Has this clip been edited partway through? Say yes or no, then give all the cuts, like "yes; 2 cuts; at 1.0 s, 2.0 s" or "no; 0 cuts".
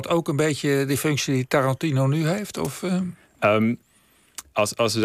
no; 0 cuts